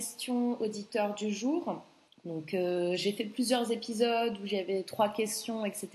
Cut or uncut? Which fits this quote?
cut